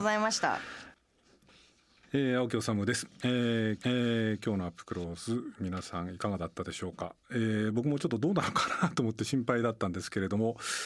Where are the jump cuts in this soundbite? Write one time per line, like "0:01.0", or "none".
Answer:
0:03.8